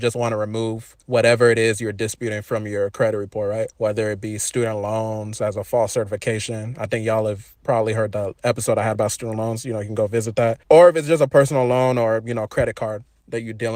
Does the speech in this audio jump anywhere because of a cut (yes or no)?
yes